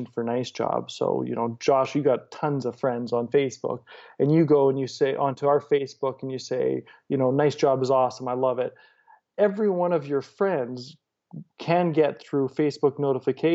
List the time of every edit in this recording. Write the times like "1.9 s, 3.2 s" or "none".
none